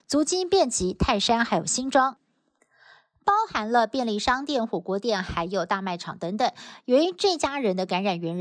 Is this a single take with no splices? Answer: yes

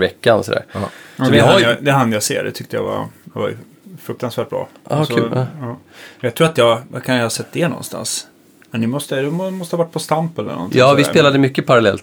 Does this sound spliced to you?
no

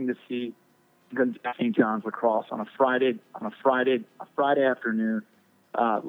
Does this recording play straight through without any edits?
no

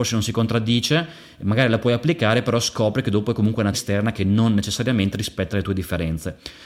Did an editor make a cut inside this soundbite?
yes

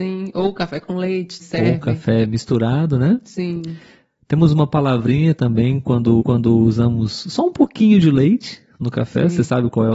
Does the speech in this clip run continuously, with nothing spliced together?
no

